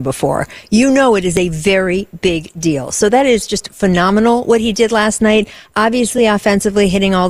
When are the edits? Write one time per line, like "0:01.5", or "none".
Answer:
none